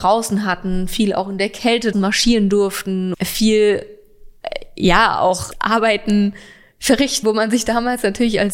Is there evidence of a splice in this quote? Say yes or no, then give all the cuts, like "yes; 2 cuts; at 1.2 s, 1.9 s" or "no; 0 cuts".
yes; 4 cuts; at 1.9 s, 3.1 s, 5.5 s, 7.2 s